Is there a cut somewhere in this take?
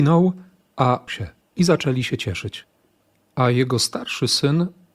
yes; 2 cuts; at 1.1 s, 1.4 s

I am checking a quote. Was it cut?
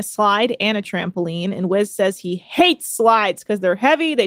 no; 0 cuts

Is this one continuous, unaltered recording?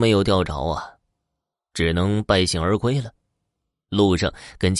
yes; 0 cuts

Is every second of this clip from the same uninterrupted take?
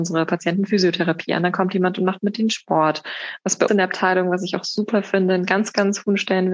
no; 1 cut; at 3.7 s

